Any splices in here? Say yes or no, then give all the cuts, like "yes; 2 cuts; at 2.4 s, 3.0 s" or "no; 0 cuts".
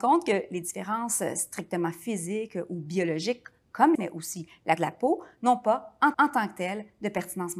yes; 3 cuts; at 3.9 s, 4.8 s, 6.1 s